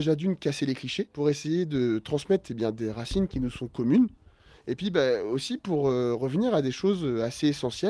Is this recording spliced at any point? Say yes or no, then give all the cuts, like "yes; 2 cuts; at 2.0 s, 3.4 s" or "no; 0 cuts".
no; 0 cuts